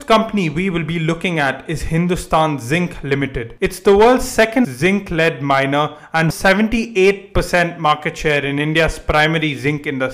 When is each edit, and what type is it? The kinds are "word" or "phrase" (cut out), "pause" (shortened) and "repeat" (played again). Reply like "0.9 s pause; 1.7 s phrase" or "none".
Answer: 4.6 s word; 6.3 s word